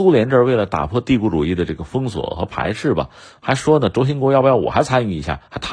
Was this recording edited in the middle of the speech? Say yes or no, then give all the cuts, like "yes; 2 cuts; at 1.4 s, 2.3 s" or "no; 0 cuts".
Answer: no; 0 cuts